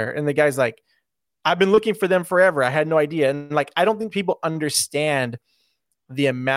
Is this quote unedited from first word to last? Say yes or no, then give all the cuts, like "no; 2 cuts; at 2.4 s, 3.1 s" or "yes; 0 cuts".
yes; 0 cuts